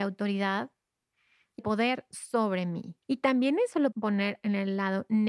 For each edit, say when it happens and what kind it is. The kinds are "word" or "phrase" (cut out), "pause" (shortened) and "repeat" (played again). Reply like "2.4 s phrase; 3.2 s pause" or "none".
1.6 s word; 3.0 s pause; 3.9 s word